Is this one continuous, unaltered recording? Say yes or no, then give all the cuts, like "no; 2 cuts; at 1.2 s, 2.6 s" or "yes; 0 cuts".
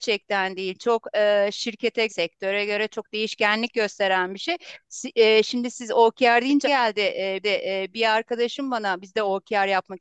no; 3 cuts; at 2.1 s, 6.6 s, 7.4 s